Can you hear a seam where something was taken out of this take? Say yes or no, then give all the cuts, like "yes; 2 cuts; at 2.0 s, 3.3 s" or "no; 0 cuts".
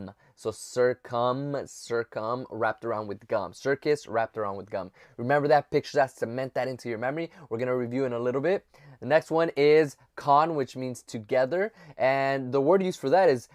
no; 0 cuts